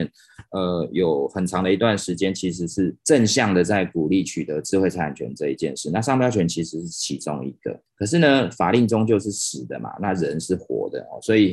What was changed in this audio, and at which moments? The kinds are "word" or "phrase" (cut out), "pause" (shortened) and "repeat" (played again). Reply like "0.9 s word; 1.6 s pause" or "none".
3.0 s pause; 7.9 s pause

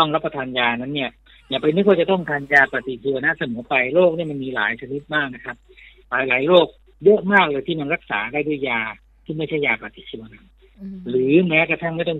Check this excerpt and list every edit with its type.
none

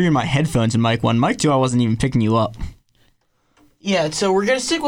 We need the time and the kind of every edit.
none

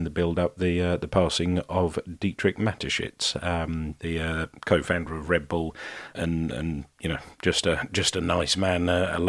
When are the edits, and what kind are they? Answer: none

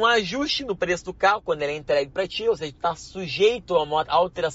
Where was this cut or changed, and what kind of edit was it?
none

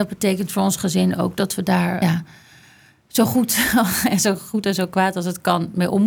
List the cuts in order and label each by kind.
2.0 s phrase

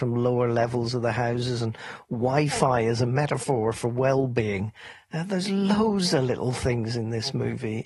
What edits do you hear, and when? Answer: none

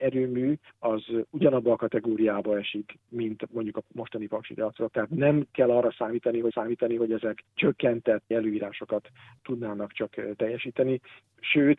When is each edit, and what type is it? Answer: 6.5 s repeat; 8.3 s word

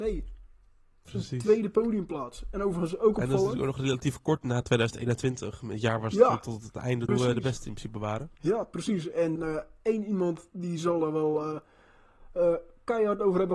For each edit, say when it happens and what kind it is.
7.1 s word; 8.4 s pause; 9.4 s word

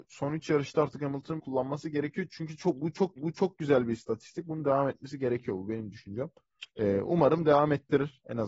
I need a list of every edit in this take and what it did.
1.4 s word; 3.2 s repeat; 6.7 s pause

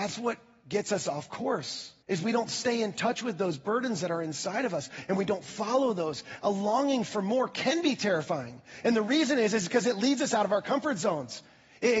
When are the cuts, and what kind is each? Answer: 2.0 s pause

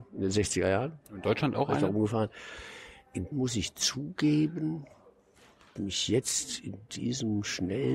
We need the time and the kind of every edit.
3.3 s word; 5.8 s phrase

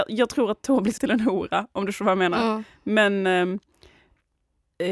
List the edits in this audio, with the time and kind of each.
1.0 s word

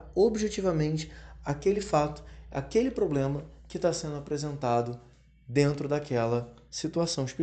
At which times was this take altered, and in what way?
none

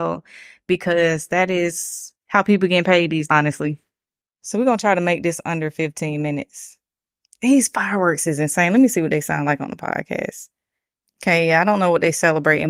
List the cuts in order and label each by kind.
2.2 s pause; 3.3 s word

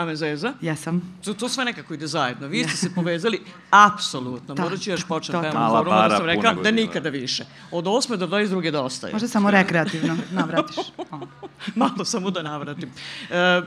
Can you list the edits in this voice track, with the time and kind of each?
6.6 s word

